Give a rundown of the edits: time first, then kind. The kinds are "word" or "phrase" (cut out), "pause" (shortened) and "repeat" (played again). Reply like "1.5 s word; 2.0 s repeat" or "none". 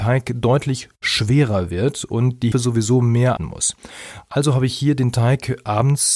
2.5 s word; 3.4 s word